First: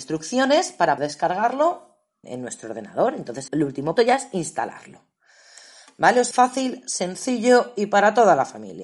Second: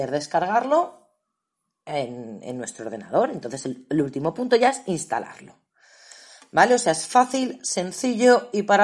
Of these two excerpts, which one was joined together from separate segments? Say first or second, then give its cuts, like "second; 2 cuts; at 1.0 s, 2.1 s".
first; 5 cuts; at 1.0 s, 2.2 s, 3.5 s, 4.0 s, 6.3 s